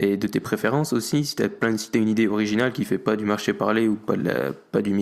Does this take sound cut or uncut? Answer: uncut